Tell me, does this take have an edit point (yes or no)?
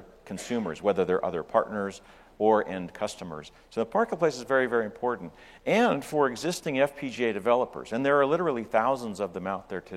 no